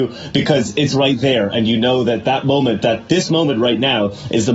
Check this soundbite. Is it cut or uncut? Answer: uncut